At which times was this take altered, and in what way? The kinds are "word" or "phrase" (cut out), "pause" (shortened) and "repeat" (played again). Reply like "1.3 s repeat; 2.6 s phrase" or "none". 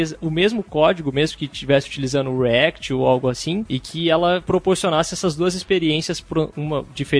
none

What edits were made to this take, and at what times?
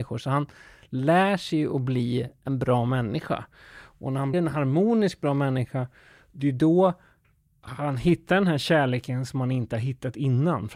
4.3 s word

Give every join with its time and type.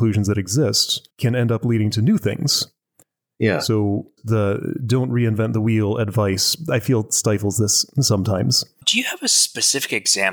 none

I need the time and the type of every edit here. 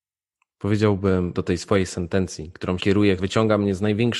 1.3 s word; 2.8 s word; 3.2 s word

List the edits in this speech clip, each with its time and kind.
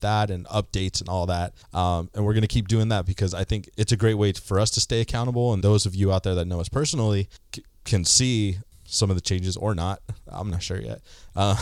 1.6 s pause; 3.7 s word; 5.6 s word

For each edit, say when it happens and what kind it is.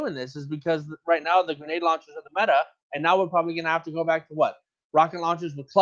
none

